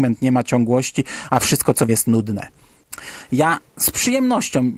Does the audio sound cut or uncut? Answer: cut